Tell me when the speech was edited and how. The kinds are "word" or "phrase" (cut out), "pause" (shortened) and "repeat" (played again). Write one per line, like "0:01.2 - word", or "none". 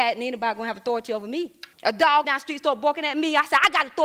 0:01.7 - pause
0:02.2 - phrase